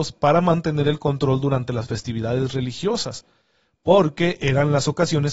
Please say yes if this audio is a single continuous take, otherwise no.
yes